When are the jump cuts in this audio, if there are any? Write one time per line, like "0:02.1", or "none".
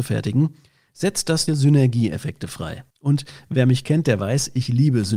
0:01.5
0:02.9

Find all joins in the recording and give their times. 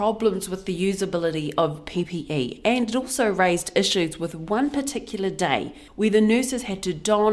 0:05.9

